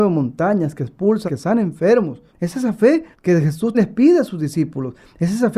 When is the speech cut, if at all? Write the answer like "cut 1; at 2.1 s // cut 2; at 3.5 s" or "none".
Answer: cut 1; at 1.3 s // cut 2; at 2.3 s // cut 3; at 3.1 s // cut 4; at 3.7 s